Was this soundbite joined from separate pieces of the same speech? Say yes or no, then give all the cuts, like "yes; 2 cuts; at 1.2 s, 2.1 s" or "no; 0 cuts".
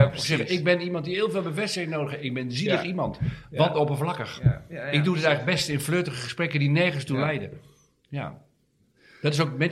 no; 0 cuts